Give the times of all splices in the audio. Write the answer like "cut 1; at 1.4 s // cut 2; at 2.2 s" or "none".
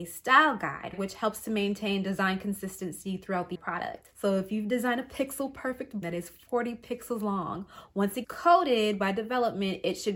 cut 1; at 3.5 s // cut 2; at 6.0 s // cut 3; at 8.2 s